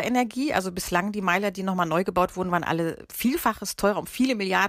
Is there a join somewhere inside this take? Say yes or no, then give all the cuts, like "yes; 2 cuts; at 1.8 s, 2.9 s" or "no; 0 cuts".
yes; 1 cut; at 3.1 s